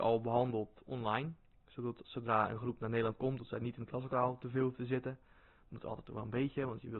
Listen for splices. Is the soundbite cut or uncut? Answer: uncut